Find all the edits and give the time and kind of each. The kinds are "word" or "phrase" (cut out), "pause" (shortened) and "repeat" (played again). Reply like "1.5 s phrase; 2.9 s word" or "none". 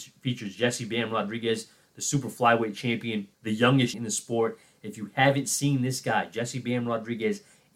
3.3 s pause; 3.9 s word